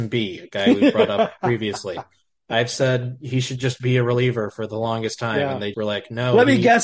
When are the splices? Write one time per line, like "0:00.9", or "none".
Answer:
0:05.7